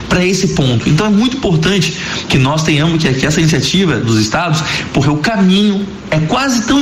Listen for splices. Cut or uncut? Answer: cut